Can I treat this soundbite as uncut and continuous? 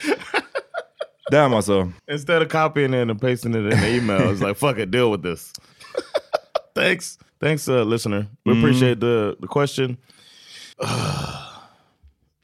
no; 3 cuts; at 2.0 s, 7.3 s, 10.7 s

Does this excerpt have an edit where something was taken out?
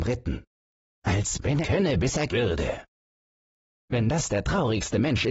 yes; 2 cuts; at 1.6 s, 2.3 s

